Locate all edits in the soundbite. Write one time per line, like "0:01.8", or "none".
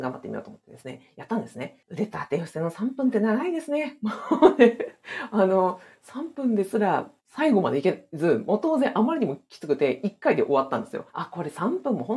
0:01.8
0:11.1